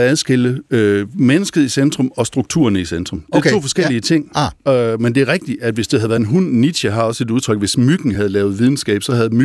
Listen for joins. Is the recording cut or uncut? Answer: uncut